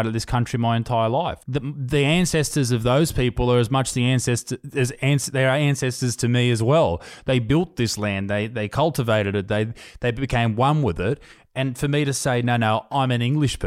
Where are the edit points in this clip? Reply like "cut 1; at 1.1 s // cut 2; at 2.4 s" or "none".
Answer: cut 1; at 1.4 s